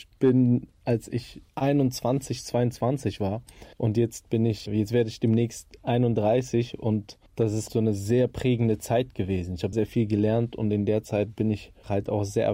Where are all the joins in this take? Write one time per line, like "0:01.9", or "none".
0:01.5
0:03.7
0:04.7
0:07.3
0:07.7
0:09.7